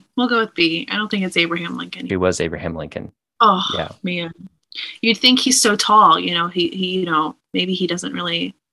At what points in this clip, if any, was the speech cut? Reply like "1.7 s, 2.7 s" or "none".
2.1 s, 3.2 s